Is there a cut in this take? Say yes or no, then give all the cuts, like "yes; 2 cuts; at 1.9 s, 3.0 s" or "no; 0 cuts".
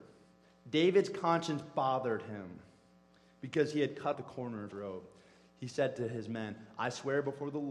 yes; 2 cuts; at 4.1 s, 4.7 s